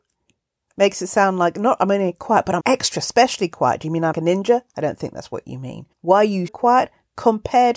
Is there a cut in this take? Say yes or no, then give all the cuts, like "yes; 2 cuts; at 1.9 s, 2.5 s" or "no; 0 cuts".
yes; 4 cuts; at 2.6 s, 4.1 s, 5.9 s, 6.5 s